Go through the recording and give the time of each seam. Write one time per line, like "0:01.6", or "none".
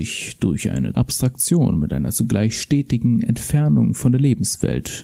0:00.9